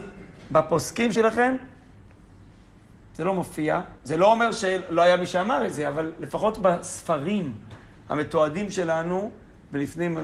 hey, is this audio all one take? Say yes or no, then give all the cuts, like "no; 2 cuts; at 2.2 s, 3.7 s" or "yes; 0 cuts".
no; 2 cuts; at 1.2 s, 4.0 s